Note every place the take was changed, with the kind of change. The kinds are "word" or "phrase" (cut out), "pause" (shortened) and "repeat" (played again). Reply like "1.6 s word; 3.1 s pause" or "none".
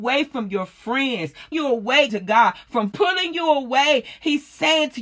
1.5 s word; 2.1 s word; 2.9 s word